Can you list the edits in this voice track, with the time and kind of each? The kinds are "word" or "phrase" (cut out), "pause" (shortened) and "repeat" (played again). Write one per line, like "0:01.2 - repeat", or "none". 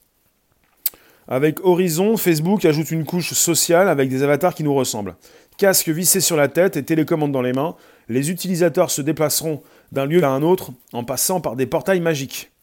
0:10.2 - word